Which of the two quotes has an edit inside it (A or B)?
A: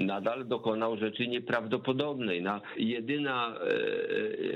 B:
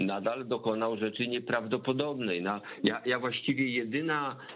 A